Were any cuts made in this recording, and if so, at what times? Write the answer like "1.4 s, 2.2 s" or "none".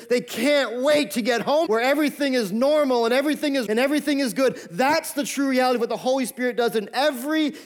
1.7 s, 3.7 s